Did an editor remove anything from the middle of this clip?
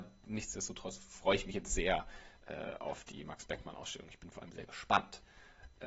no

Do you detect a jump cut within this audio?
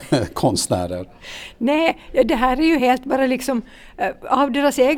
no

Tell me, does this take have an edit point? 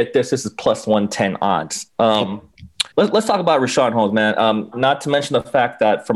yes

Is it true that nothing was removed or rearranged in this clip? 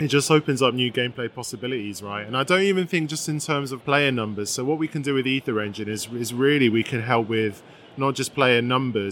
no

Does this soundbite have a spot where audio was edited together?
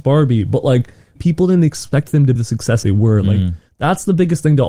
yes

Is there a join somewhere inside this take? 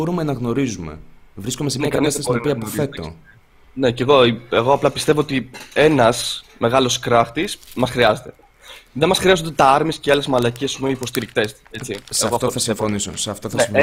no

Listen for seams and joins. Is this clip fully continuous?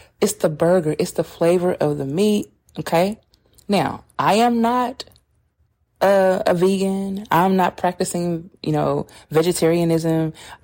yes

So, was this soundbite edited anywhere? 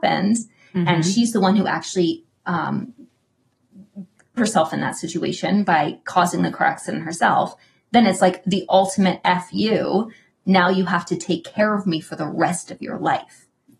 yes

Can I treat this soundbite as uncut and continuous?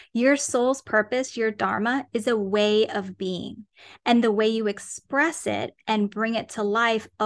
yes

